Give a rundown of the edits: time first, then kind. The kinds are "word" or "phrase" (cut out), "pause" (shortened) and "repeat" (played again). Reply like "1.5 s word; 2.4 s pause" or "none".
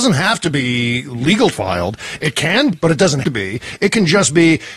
1.5 s word; 2.7 s word; 3.2 s word

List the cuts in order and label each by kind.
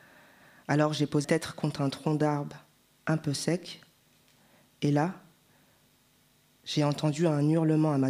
1.2 s word

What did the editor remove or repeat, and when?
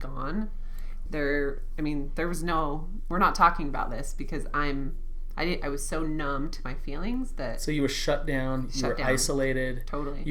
1.1 s word

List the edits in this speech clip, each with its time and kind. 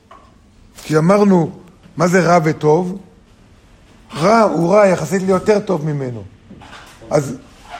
none

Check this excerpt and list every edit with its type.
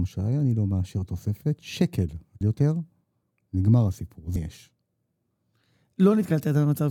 2.4 s phrase; 4.4 s word

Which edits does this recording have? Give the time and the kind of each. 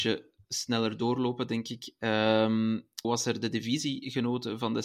3.0 s word

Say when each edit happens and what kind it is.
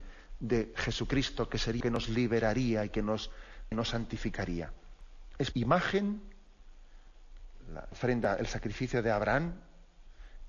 1.8 s phrase; 3.7 s word; 5.5 s word; 7.9 s word

